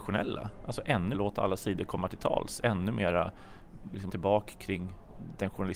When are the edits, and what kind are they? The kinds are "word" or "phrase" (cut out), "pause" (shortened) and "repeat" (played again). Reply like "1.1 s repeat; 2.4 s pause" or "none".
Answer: 1.1 s word; 4.1 s phrase